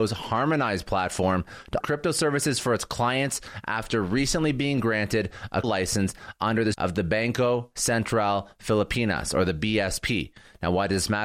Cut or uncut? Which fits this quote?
cut